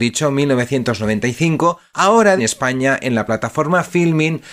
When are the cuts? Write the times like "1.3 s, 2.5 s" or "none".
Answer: 2.4 s

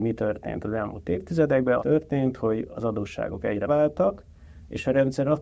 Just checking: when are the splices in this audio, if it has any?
1.8 s, 3.7 s

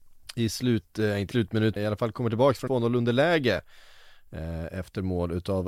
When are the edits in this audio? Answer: 1.3 s, 1.8 s, 2.7 s

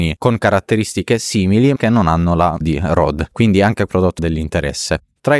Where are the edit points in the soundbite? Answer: 1.8 s, 2.6 s, 3.9 s, 4.2 s

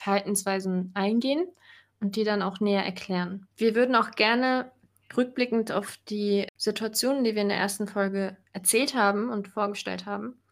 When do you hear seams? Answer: 3.5 s, 8.5 s

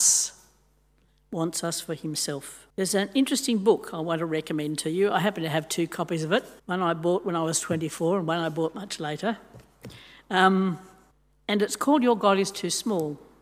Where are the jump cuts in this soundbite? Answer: 2.7 s, 6.6 s, 11.1 s

